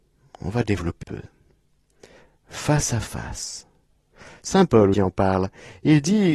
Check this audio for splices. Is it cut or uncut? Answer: cut